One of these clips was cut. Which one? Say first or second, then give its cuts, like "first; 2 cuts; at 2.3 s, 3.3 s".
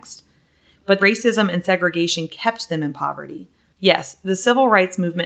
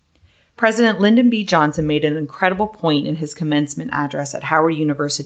first; 2 cuts; at 1.0 s, 3.6 s